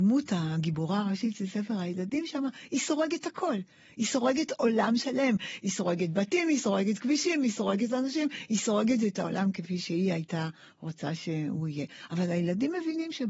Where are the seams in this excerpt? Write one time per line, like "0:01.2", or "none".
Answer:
none